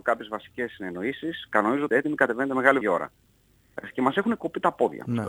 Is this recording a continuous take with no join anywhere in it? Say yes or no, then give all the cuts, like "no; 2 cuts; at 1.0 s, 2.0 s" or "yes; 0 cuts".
no; 2 cuts; at 1.9 s, 2.8 s